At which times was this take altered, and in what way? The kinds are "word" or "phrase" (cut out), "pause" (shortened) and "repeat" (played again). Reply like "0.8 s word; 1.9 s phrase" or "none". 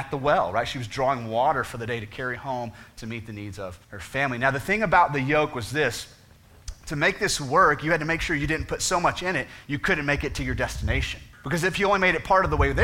3.8 s pause; 11.3 s pause